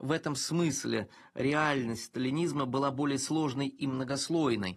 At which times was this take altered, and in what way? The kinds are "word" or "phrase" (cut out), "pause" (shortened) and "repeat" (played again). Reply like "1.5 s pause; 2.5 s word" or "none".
none